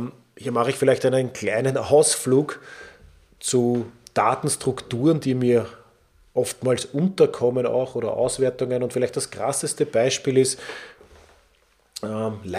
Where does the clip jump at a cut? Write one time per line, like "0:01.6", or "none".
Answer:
none